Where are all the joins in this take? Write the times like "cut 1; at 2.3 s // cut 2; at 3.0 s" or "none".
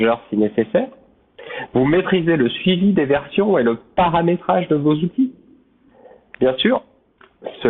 none